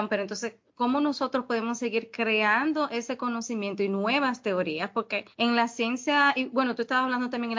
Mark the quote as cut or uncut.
cut